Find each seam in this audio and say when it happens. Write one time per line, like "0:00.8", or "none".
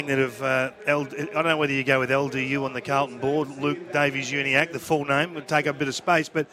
0:03.4